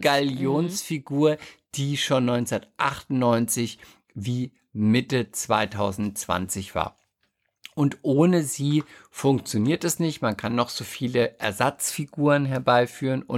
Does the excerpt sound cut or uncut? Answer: uncut